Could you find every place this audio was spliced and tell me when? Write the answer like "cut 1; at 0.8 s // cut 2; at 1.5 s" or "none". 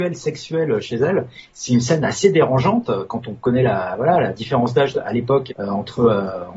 cut 1; at 5.5 s